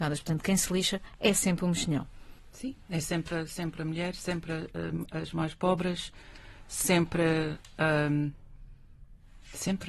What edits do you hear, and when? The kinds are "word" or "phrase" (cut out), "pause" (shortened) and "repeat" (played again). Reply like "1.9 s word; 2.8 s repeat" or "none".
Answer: 2.4 s pause